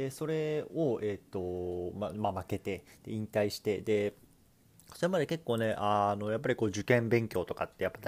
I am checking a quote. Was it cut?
no; 0 cuts

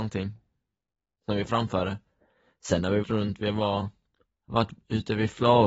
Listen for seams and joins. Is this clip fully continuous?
no; 1 cut; at 3.0 s

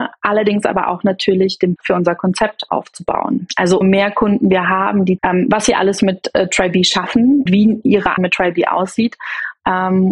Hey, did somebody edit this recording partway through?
yes; 6 cuts; at 1.8 s, 2.7 s, 3.8 s, 5.2 s, 7.5 s, 8.2 s

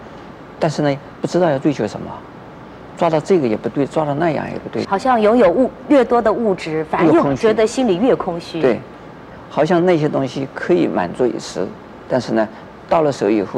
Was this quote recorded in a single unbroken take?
no; 1 cut; at 4.8 s

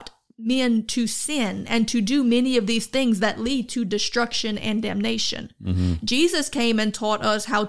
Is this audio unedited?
yes; 0 cuts

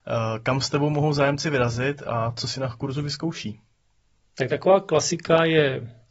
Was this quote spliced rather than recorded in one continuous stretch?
no; 0 cuts

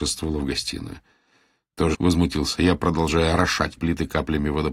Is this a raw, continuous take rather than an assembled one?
no; 2 cuts; at 1.9 s, 3.8 s

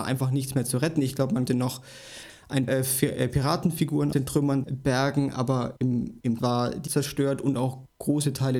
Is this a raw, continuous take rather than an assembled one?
no; 6 cuts; at 1.5 s, 2.7 s, 4.1 s, 4.6 s, 6.4 s, 6.9 s

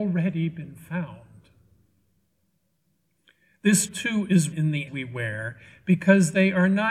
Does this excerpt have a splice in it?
yes; 3 cuts; at 3.9 s, 4.5 s, 4.9 s

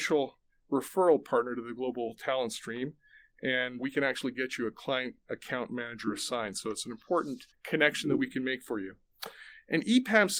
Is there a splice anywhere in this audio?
yes; 2 cuts; at 3.8 s, 7.5 s

